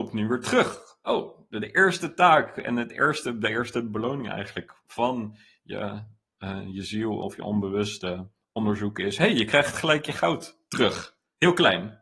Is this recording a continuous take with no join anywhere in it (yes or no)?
yes